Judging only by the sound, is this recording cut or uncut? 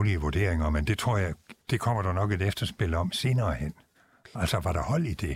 cut